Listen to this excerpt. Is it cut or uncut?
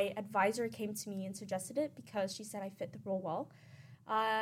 uncut